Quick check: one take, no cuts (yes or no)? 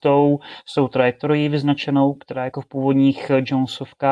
yes